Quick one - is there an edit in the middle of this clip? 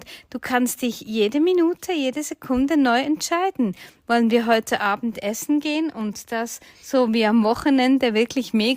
no; 0 cuts

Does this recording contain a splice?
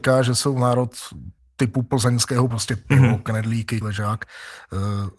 yes; 3 cuts; at 1.4 s, 2.5 s, 3.8 s

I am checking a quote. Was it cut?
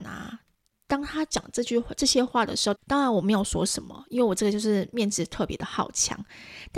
yes; 1 cut; at 2.8 s

